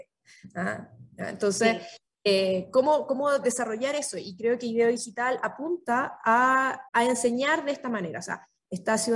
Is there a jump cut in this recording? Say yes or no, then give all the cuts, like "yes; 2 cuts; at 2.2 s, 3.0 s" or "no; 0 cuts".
yes; 1 cut; at 6.9 s